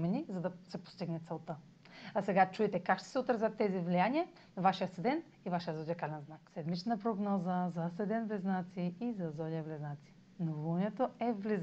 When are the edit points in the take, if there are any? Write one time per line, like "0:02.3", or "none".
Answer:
none